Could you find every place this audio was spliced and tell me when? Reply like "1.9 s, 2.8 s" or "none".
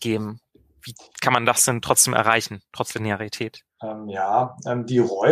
none